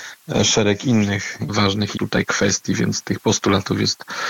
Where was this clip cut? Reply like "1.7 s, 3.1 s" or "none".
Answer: 1.5 s, 2.0 s